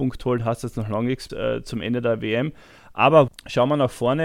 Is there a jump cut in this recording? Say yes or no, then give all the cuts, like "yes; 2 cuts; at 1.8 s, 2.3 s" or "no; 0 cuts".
yes; 2 cuts; at 1.3 s, 3.3 s